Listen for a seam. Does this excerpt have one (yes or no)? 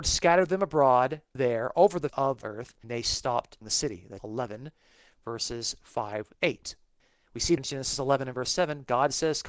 yes